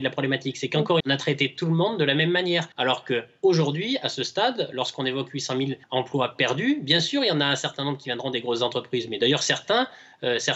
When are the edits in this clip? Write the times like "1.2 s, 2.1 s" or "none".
1.0 s, 2.7 s, 5.8 s